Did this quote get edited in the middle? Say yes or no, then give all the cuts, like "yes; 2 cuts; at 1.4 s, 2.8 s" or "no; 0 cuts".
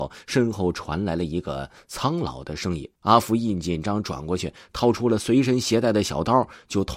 yes; 1 cut; at 3.0 s